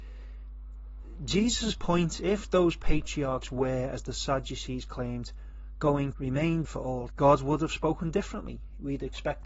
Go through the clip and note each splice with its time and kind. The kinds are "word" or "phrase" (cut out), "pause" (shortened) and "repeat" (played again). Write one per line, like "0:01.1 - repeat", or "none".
0:02.2 - word
0:06.1 - word
0:06.6 - word
0:07.1 - word